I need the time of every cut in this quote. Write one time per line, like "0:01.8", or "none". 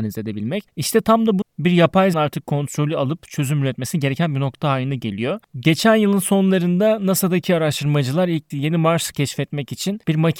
0:01.4
0:02.1
0:08.5
0:09.1